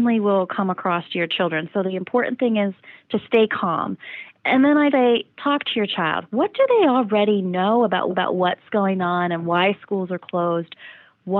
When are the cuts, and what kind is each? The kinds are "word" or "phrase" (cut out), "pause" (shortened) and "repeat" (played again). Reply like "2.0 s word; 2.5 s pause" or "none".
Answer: 4.9 s word; 8.1 s repeat